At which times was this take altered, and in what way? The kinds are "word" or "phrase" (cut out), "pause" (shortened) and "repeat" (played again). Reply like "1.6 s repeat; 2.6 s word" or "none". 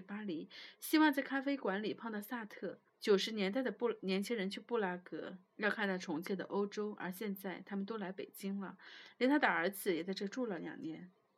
2.9 s pause; 5.5 s pause